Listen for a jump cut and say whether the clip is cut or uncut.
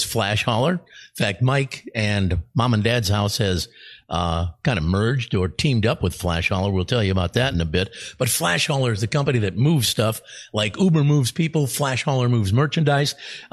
uncut